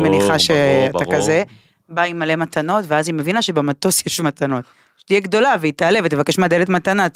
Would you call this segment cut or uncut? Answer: uncut